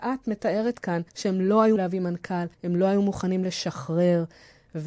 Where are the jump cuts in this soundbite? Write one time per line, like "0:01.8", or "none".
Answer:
0:01.1
0:01.8
0:02.5